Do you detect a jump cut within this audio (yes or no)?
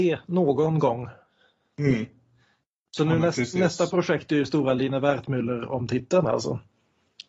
no